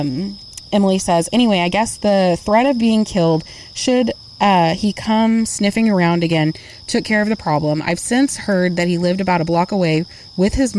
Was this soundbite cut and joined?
no; 0 cuts

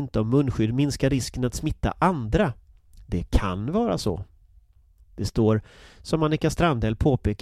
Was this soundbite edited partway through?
no; 0 cuts

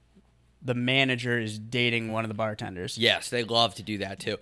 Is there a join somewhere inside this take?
no; 0 cuts

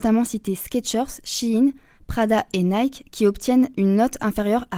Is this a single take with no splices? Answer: yes; 0 cuts

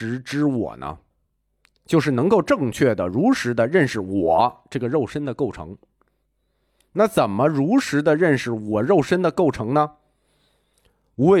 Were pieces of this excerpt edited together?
no; 0 cuts

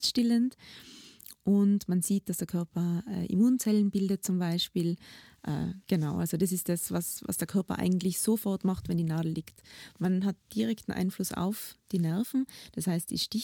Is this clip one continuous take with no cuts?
no; 1 cut; at 5.8 s

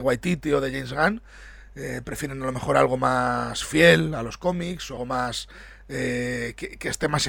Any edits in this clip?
yes; 1 cut; at 5.0 s

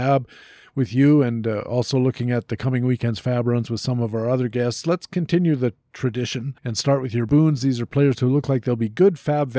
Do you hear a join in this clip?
yes; 1 cut; at 6.6 s

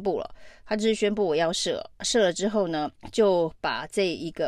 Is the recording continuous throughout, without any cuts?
no; 1 cut; at 3.0 s

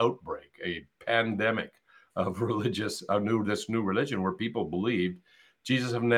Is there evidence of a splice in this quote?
no; 0 cuts

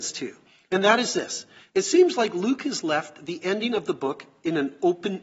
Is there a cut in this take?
no; 0 cuts

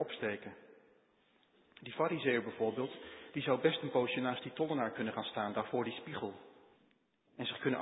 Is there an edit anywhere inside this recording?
yes; 1 cut; at 6.8 s

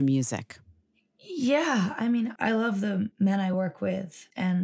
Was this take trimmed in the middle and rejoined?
no; 0 cuts

